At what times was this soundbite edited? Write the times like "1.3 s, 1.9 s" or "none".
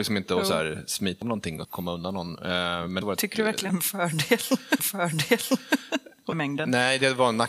1.2 s, 1.6 s, 3.0 s, 3.7 s, 4.8 s, 6.3 s

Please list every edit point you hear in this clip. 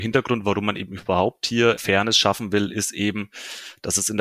none

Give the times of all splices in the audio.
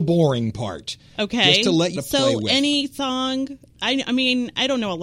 2.0 s

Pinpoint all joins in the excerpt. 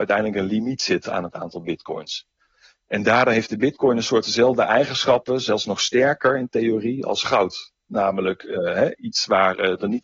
none

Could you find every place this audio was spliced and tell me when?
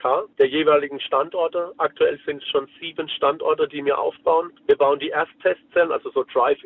none

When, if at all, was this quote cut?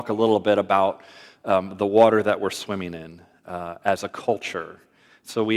none

